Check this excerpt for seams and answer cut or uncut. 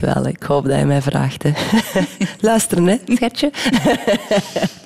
uncut